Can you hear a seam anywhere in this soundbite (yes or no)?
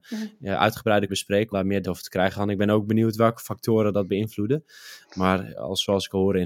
yes